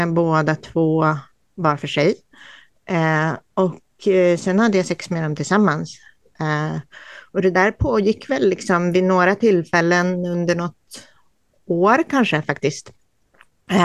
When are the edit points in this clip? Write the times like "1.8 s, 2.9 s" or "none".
none